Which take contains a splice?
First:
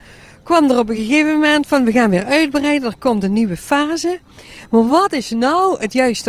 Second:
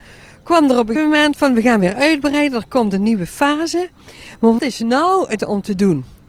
second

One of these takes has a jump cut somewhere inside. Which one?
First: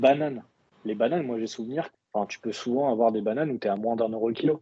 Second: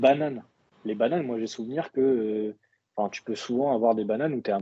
first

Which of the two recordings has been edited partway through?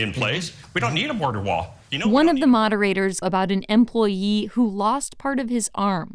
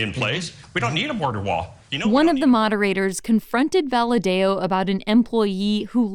first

